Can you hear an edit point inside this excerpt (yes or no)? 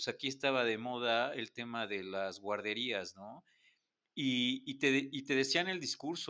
no